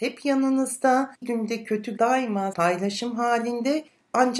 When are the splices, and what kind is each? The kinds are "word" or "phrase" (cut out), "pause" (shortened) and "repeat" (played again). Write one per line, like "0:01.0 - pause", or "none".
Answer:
0:01.2 - word
0:02.0 - word
0:02.5 - word